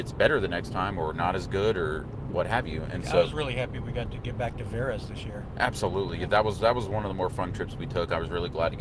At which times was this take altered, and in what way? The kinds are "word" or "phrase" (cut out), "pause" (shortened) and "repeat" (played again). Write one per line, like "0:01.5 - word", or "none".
none